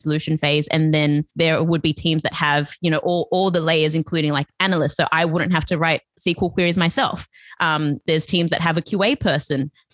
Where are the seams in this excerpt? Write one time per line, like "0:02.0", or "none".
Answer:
0:01.3

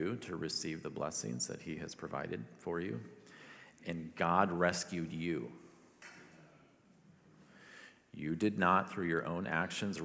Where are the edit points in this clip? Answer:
none

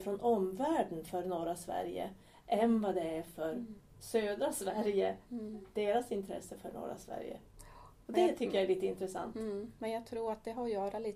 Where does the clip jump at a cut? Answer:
none

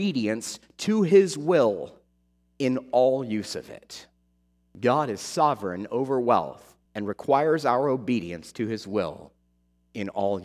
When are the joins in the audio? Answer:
0:06.9

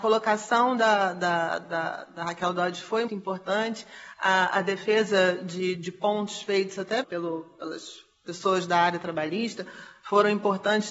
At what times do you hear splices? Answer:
0:03.1
0:05.8
0:07.0

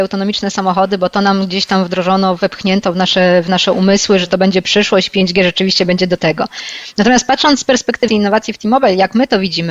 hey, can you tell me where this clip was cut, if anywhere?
0:08.1

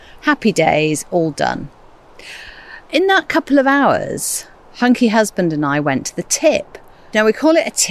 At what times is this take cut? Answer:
none

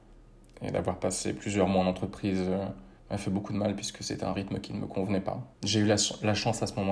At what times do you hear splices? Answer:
0:03.0
0:05.5

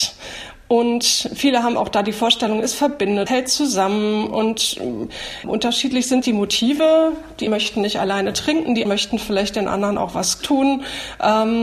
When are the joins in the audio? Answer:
0:03.3
0:05.4
0:06.2
0:07.5
0:08.9
0:10.4

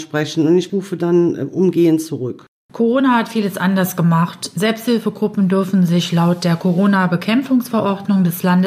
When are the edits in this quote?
none

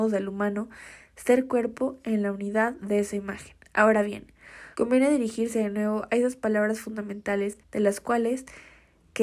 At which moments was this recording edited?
0:03.6
0:04.7
0:07.6

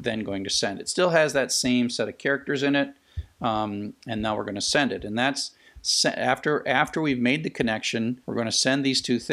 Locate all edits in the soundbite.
0:08.2

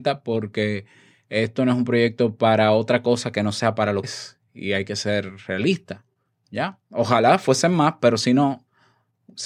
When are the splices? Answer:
0:04.0

